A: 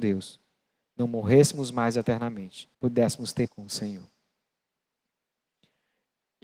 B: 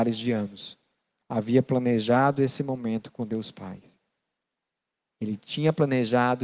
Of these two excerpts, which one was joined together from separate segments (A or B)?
A